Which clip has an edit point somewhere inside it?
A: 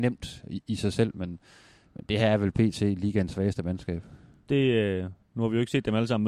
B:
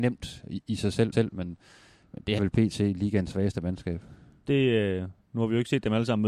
B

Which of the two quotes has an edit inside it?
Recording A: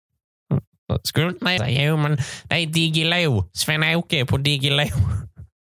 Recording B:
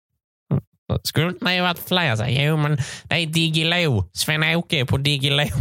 A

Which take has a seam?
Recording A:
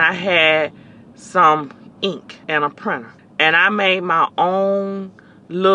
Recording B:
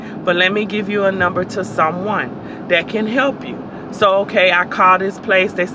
A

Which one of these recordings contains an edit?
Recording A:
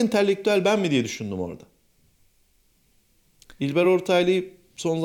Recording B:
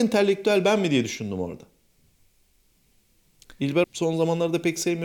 B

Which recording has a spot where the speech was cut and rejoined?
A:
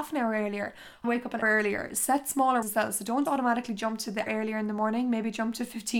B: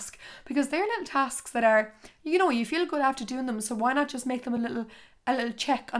A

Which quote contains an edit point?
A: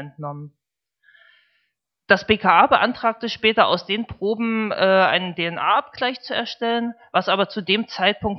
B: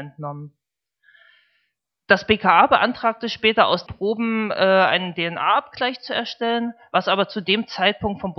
B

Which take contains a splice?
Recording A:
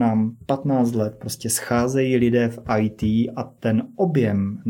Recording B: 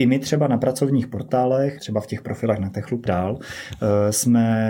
B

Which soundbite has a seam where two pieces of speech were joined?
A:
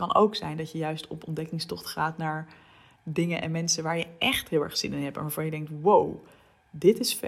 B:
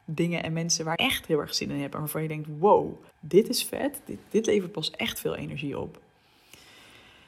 B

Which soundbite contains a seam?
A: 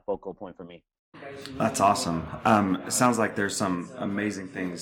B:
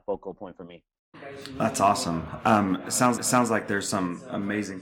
B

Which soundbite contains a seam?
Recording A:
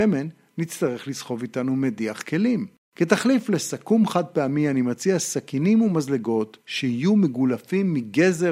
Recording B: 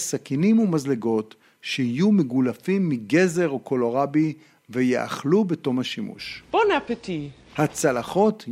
A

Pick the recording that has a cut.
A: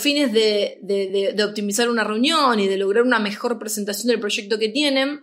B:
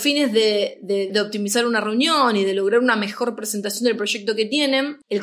B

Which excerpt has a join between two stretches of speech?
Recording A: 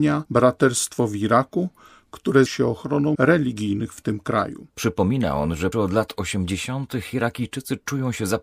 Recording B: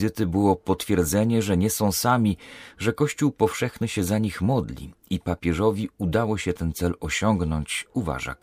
A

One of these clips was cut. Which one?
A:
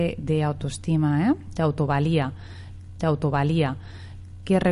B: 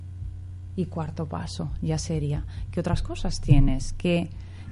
A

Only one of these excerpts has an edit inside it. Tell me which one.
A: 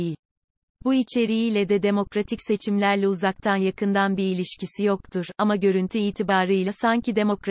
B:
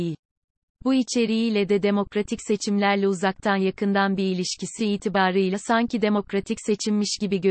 B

